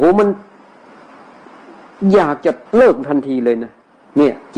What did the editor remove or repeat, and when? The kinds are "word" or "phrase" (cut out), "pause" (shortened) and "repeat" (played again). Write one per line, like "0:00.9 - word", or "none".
0:02.7 - pause